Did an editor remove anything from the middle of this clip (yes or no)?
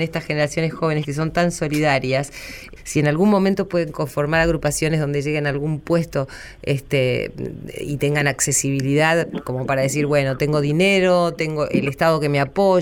yes